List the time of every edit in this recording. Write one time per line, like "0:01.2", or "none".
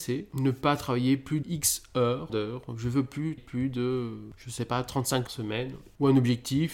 0:01.4
0:02.3
0:03.4
0:05.3